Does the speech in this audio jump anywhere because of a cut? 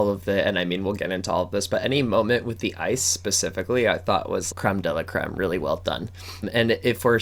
yes; 1 cut; at 4.5 s

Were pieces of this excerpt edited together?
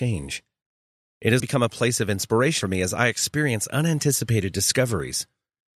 yes; 2 cuts; at 1.4 s, 2.6 s

